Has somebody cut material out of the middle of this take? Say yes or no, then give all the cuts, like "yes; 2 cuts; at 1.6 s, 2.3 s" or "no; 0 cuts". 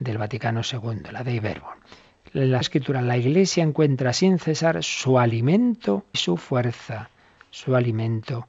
yes; 2 cuts; at 2.6 s, 6.1 s